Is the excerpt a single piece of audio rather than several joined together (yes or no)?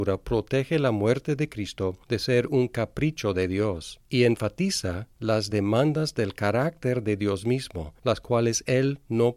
yes